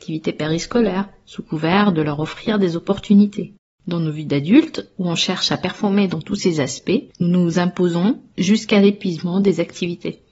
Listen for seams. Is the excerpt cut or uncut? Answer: uncut